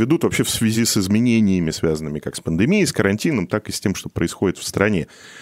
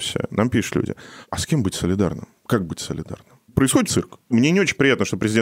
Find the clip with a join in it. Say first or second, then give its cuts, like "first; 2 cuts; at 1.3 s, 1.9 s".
second; 1 cut; at 3.9 s